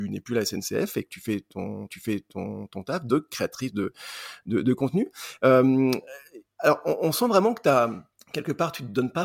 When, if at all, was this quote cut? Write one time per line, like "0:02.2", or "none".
0:01.9
0:06.5
0:08.2